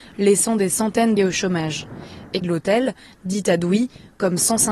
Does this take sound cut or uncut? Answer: cut